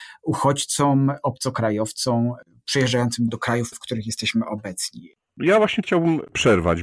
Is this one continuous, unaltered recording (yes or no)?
no